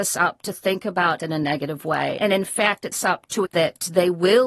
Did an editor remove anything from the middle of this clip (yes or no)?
yes